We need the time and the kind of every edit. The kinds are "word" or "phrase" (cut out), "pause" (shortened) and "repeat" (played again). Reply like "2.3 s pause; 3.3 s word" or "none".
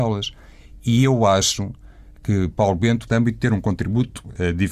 3.1 s phrase